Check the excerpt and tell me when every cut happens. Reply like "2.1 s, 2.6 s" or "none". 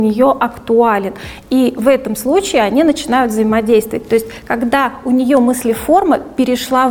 none